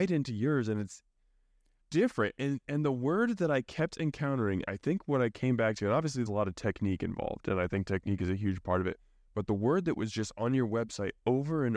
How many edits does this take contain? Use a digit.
2